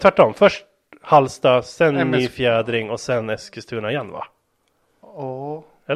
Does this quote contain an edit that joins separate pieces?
no; 0 cuts

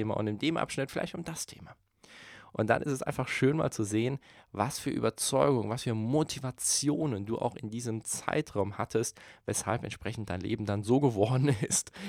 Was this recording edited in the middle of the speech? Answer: no; 0 cuts

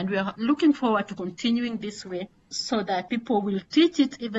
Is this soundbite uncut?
yes; 0 cuts

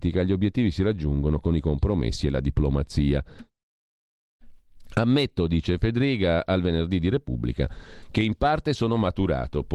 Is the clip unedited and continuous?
yes; 0 cuts

